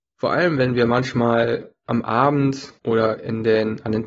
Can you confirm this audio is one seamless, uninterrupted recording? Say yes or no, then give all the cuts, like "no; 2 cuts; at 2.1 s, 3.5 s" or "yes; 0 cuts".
no; 1 cut; at 2.8 s